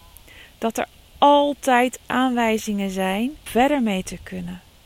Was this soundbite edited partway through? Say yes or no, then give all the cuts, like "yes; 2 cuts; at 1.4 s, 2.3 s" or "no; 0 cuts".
yes; 1 cut; at 3.5 s